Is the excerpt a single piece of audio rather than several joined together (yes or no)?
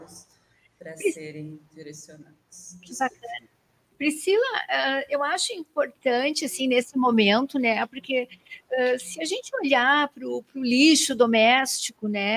yes